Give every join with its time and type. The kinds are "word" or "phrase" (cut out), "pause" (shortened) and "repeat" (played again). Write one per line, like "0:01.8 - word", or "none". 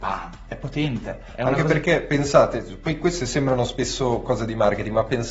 none